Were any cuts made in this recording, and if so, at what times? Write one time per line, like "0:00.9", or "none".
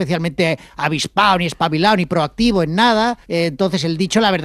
0:03.2